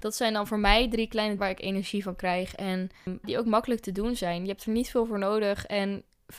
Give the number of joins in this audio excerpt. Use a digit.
2